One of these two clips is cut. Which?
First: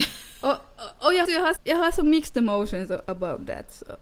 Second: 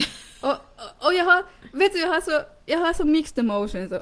first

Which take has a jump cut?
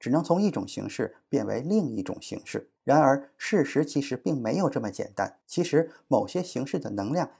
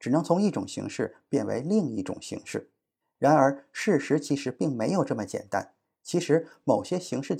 first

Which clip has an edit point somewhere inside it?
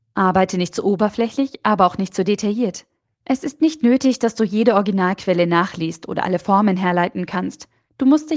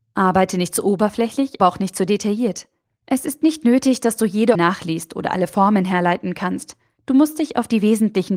second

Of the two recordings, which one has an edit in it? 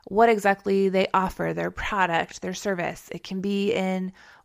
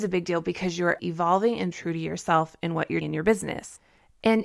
second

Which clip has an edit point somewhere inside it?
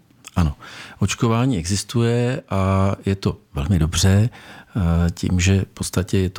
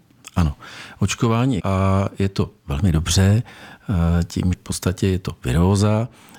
second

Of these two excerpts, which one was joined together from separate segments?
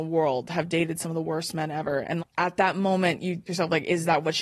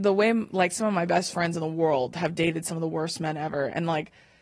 first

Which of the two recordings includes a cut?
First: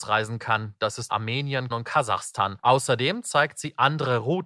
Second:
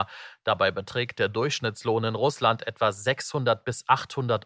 first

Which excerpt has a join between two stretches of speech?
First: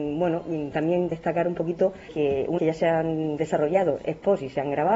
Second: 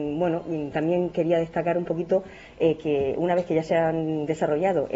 first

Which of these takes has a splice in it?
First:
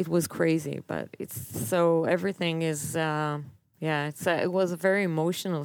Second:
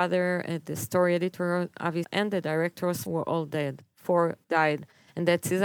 second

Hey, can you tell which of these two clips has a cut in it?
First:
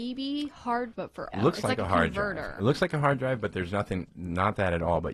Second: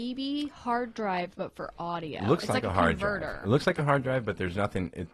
first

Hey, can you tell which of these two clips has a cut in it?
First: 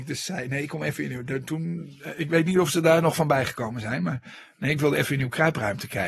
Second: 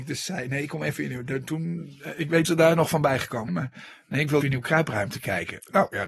second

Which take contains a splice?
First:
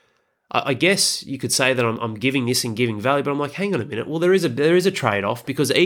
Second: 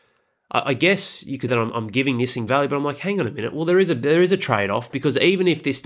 second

